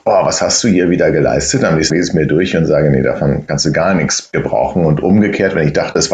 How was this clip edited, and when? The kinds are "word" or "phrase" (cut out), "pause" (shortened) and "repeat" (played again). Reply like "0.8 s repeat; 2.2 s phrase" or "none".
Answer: 1.9 s word